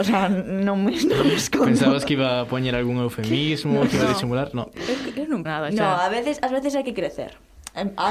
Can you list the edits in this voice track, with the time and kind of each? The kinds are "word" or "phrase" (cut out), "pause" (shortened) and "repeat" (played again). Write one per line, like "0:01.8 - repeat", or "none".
0:05.5 - word